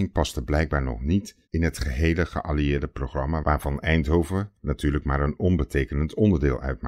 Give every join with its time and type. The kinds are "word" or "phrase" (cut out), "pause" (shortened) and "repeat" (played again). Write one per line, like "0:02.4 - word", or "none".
0:01.4 - pause